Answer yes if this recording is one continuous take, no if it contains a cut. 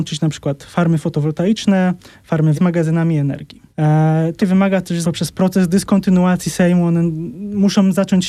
no